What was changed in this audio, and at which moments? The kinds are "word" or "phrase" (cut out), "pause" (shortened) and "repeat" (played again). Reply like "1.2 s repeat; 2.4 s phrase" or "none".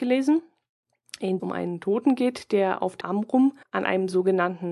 1.4 s phrase; 3.0 s word; 3.6 s pause